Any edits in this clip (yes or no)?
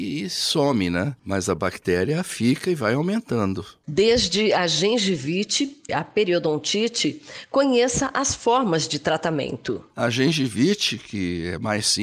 yes